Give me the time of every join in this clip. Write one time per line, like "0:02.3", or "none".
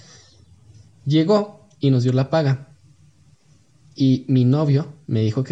none